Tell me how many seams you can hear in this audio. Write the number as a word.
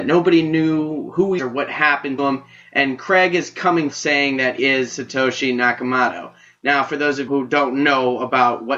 five